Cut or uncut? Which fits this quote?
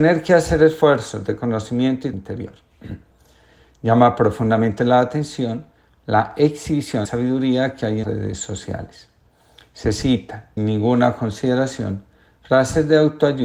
cut